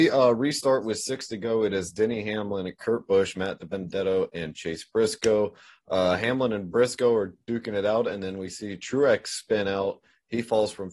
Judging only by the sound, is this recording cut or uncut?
uncut